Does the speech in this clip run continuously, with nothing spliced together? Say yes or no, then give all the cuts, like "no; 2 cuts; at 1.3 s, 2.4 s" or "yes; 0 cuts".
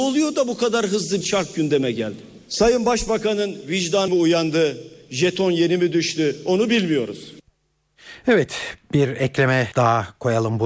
no; 3 cuts; at 1.2 s, 4.1 s, 9.7 s